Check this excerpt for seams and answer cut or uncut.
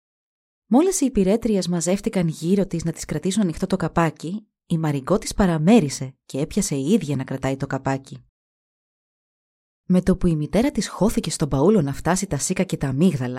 uncut